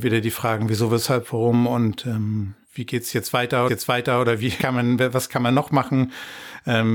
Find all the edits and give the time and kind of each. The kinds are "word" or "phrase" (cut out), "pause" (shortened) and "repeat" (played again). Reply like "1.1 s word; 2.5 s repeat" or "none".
2.6 s pause; 3.7 s repeat; 4.6 s word